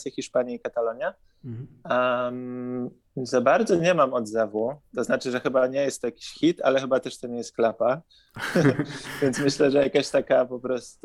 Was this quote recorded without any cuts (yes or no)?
yes